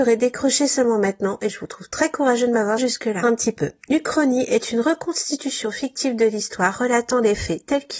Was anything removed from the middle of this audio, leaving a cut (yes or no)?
yes